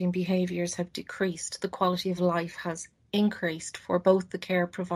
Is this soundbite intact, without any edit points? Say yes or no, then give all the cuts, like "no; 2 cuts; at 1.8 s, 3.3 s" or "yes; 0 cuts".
yes; 0 cuts